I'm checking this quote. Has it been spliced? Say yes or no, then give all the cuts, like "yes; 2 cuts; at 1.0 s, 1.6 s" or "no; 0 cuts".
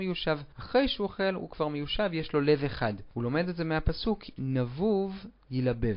yes; 1 cut; at 4.4 s